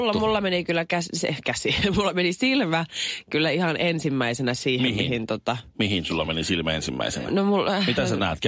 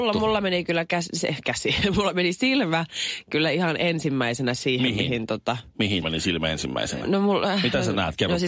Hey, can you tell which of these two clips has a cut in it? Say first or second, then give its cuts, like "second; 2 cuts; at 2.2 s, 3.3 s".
second; 1 cut; at 6.0 s